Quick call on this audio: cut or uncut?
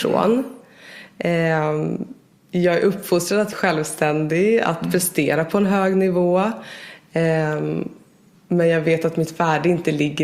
cut